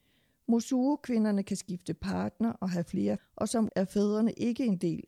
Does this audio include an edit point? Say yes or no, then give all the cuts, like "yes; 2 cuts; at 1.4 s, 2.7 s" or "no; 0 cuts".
yes; 2 cuts; at 3.2 s, 3.7 s